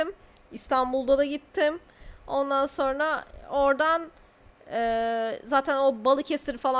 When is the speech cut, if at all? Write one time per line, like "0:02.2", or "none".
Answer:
none

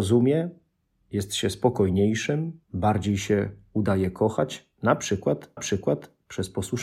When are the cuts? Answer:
0:02.6
0:05.6

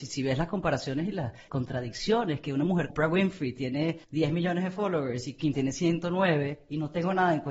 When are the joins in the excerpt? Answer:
0:01.5
0:02.9
0:04.0
0:05.5

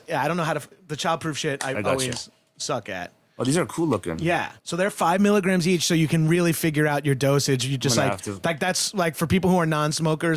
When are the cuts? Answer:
0:04.6

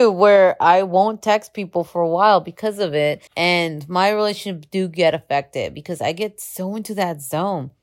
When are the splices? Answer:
0:03.3

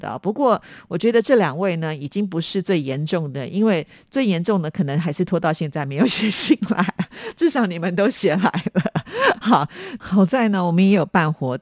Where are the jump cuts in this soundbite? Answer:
none

